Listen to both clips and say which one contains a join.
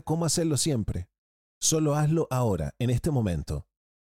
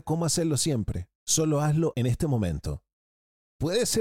second; 2 cuts; at 1.2 s, 1.9 s

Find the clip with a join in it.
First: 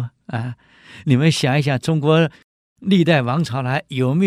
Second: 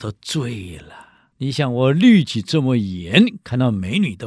second; 1 cut; at 1.3 s

